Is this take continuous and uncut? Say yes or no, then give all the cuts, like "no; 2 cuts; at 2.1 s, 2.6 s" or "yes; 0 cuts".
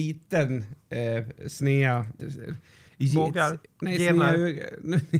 no; 2 cuts; at 2.2 s, 3.7 s